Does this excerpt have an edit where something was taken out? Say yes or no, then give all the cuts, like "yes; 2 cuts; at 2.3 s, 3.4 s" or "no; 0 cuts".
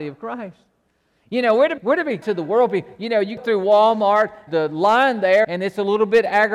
yes; 5 cuts; at 1.8 s, 2.2 s, 3.4 s, 4.5 s, 5.4 s